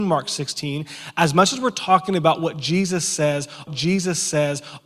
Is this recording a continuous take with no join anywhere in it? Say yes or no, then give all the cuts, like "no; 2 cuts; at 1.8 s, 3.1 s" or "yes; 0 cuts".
no; 1 cut; at 3.7 s